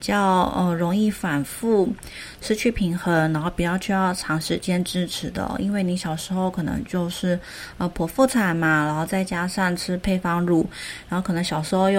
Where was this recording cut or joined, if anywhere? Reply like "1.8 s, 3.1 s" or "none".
none

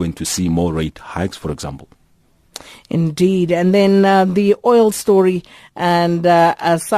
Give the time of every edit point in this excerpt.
none

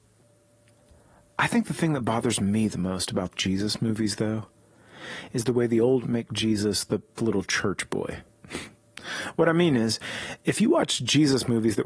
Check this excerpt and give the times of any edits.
3.3 s, 6.0 s, 7.2 s

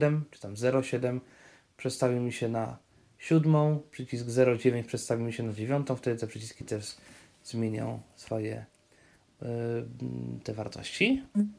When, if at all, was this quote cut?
none

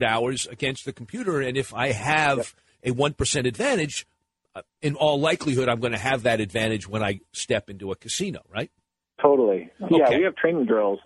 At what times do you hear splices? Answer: none

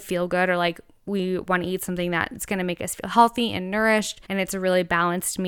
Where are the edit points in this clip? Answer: 4.2 s

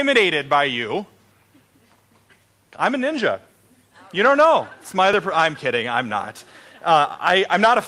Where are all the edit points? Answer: none

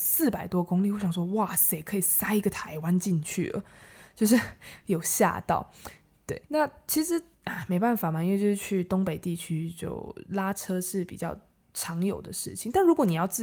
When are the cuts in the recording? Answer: 6.5 s, 7.3 s

